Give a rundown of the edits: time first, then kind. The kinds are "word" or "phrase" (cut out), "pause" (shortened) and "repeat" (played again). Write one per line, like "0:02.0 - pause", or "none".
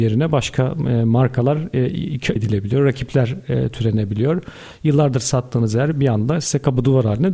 0:02.4 - word